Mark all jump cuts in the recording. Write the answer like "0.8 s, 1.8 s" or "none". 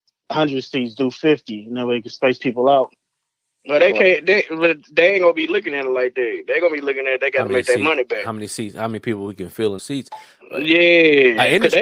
9.8 s